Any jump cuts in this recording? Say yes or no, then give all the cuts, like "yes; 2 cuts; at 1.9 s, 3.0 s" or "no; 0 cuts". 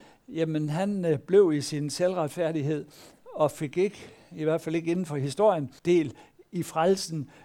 yes; 1 cut; at 5.8 s